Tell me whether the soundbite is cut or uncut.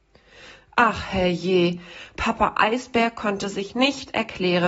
uncut